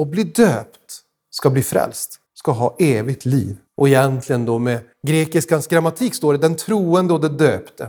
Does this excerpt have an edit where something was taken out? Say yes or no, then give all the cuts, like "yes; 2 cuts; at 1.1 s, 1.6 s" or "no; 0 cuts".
yes; 3 cuts; at 2.3 s, 3.7 s, 4.9 s